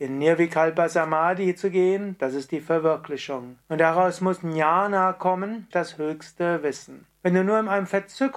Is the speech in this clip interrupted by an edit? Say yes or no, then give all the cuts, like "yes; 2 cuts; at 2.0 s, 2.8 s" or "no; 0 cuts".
yes; 3 cuts; at 3.6 s, 5.7 s, 7.1 s